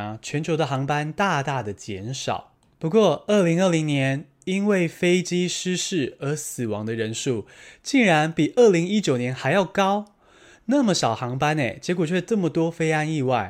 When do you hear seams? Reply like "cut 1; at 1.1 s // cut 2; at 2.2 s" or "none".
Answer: none